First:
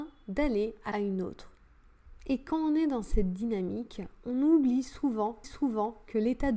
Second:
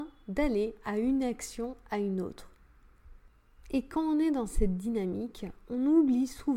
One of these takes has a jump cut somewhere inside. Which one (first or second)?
first